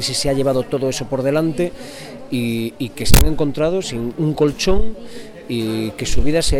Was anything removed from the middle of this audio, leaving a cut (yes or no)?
yes